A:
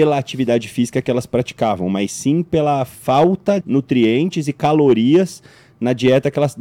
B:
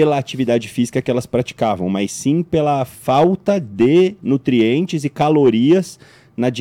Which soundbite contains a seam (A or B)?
A